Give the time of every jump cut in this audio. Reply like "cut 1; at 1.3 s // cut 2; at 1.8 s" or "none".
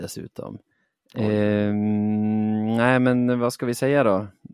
none